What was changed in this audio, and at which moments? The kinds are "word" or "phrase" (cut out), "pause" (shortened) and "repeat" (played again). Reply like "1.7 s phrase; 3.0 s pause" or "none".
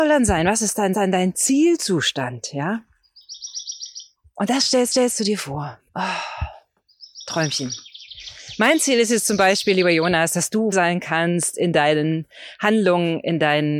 0.9 s repeat; 4.2 s pause; 4.9 s repeat; 5.9 s pause; 10.7 s word